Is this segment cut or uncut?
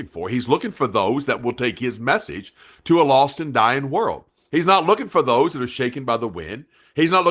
uncut